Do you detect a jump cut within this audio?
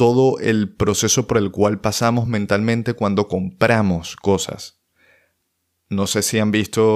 no; 0 cuts

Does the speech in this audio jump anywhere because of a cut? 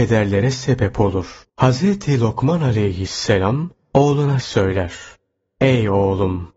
yes; 2 cuts; at 1.5 s, 4.4 s

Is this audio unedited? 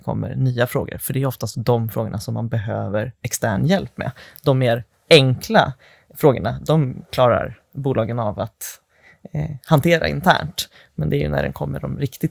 yes; 0 cuts

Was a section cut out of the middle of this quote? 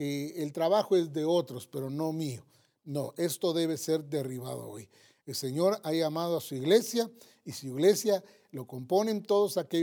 no; 0 cuts

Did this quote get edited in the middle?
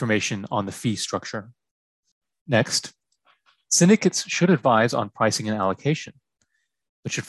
no; 0 cuts

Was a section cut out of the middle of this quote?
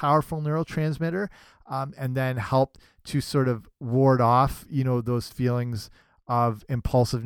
no; 0 cuts

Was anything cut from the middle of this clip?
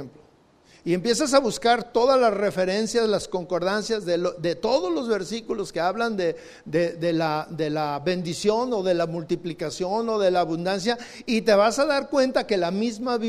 no; 0 cuts

